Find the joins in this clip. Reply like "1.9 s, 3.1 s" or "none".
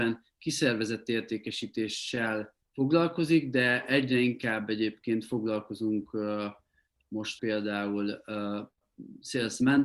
2.6 s, 7.4 s